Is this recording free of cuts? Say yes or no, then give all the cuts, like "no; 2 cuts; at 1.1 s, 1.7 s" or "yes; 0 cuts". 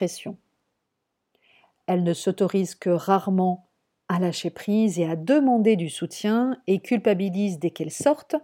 yes; 0 cuts